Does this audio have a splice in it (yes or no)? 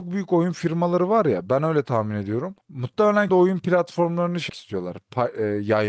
yes